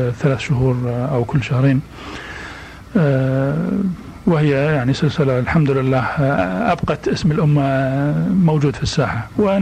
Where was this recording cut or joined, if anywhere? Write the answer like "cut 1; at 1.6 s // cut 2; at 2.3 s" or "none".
none